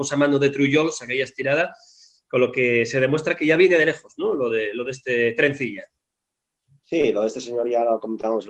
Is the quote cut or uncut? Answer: uncut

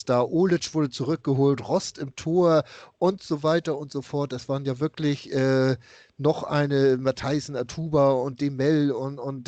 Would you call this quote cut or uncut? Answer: uncut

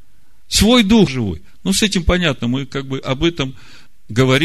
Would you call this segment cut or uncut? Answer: cut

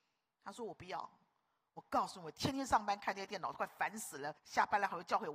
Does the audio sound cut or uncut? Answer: cut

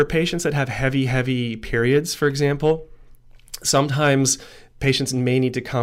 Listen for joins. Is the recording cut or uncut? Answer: uncut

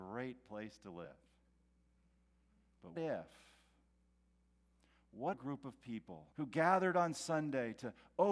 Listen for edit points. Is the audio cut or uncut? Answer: cut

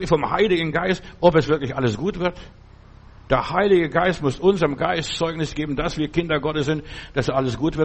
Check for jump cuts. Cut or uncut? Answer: uncut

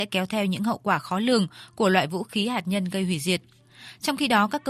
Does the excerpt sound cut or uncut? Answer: uncut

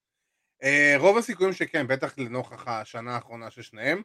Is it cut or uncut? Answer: uncut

